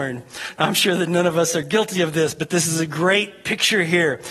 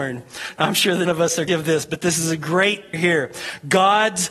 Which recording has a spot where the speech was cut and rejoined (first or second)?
second